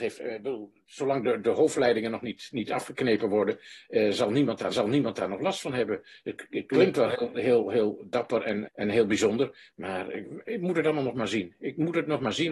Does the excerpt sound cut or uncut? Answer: cut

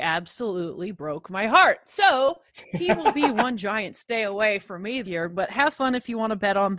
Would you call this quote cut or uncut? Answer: cut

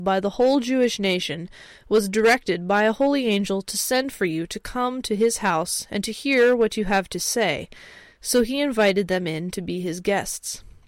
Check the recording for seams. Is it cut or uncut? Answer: uncut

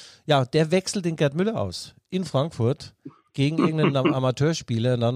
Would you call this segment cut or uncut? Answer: uncut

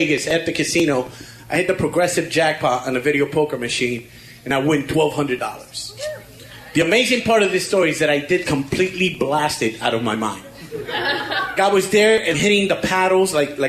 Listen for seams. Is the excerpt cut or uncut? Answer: cut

